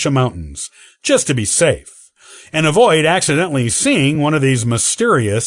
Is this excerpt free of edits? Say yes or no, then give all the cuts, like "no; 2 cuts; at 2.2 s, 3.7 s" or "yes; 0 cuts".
yes; 0 cuts